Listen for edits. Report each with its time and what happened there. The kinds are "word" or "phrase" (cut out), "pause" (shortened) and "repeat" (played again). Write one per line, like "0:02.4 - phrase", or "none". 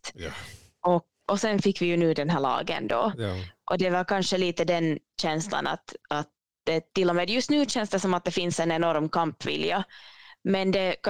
0:01.2 - word
0:06.0 - pause